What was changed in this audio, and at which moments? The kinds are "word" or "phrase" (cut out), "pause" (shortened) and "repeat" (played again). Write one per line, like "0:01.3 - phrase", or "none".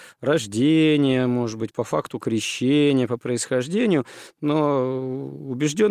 none

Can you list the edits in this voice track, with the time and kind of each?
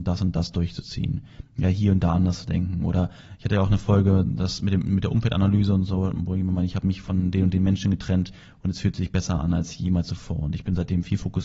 none

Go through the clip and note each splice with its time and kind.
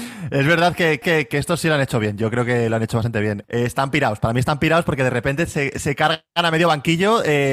0:01.0 - repeat

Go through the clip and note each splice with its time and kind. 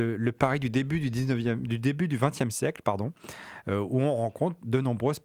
none

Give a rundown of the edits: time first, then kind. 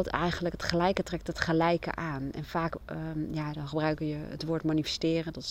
none

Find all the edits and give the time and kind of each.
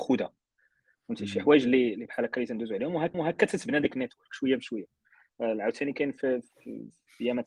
0:03.1 - repeat

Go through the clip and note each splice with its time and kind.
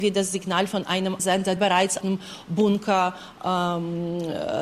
0:01.2 - word
0:01.6 - word
0:02.0 - word

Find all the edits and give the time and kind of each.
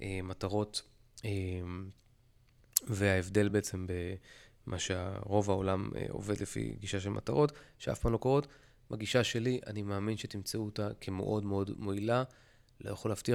none

